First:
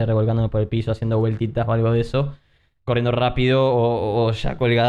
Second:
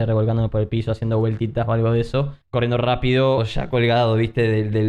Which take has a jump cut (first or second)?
second